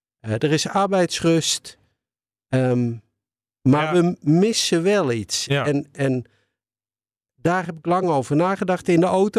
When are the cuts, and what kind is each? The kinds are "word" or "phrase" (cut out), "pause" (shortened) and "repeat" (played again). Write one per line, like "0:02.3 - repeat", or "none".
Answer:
none